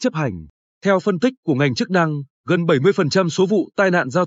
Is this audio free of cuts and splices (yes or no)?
yes